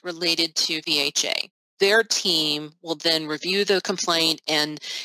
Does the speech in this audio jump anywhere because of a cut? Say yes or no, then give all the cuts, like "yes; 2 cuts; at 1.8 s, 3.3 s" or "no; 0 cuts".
no; 0 cuts